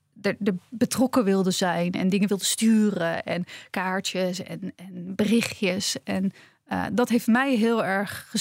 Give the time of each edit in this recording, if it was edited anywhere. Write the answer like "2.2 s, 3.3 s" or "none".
none